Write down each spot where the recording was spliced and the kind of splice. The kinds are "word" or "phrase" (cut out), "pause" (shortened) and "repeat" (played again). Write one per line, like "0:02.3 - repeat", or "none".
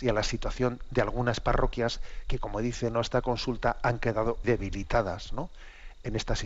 0:04.4 - word